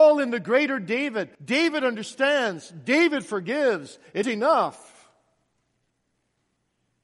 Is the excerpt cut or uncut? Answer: cut